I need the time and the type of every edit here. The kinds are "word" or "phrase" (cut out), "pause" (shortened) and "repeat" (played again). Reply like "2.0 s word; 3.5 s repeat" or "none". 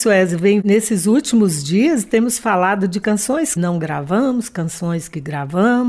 3.0 s word; 3.6 s word